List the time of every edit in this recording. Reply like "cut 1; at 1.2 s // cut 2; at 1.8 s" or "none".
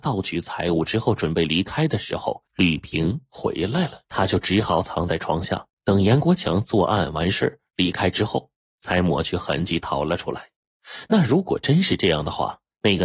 cut 1; at 2.5 s // cut 2; at 4.0 s // cut 3; at 5.7 s